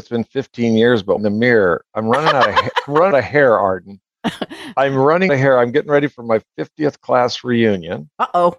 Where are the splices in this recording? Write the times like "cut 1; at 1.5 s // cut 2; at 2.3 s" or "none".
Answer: cut 1; at 1.2 s // cut 2; at 3.1 s // cut 3; at 5.3 s